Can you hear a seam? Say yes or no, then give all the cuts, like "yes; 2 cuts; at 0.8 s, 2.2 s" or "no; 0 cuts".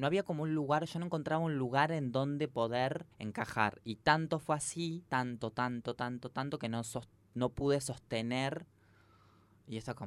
yes; 2 cuts; at 3.1 s, 5.1 s